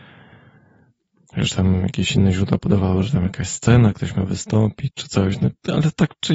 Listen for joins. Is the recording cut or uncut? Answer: uncut